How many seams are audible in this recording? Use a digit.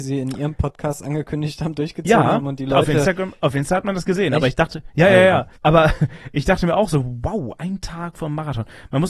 1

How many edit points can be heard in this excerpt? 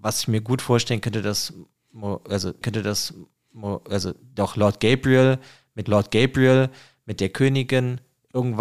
2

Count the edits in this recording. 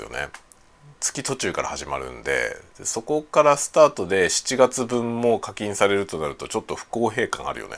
1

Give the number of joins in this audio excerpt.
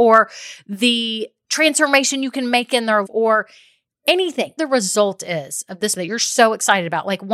3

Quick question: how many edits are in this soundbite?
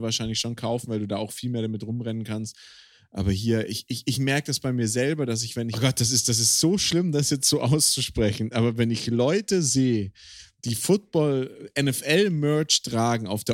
1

